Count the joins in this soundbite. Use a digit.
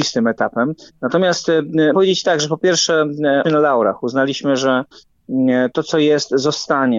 2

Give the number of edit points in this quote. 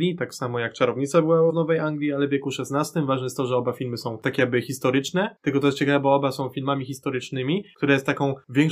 1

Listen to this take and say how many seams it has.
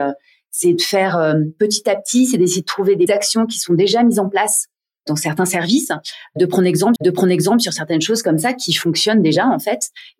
2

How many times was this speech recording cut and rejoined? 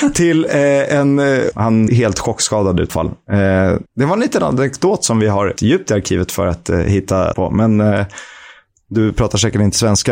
6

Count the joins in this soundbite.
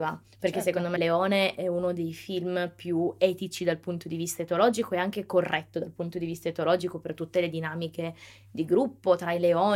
1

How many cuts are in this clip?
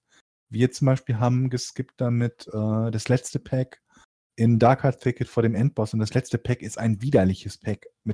0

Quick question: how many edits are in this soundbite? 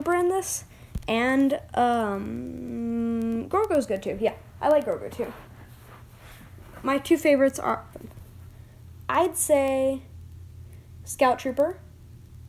1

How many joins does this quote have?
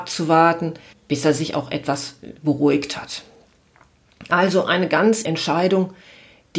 3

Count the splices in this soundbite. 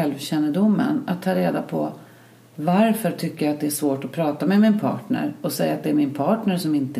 0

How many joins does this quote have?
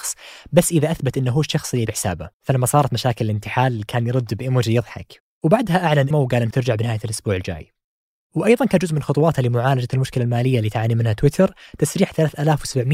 4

